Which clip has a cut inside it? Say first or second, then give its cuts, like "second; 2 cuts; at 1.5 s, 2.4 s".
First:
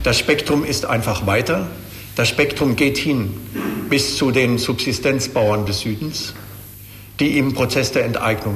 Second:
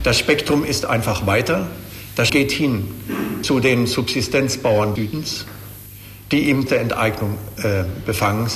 second; 4 cuts; at 2.3 s, 3.4 s, 5.0 s, 6.7 s